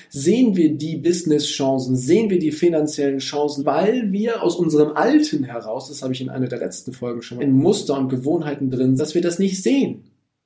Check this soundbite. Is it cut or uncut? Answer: cut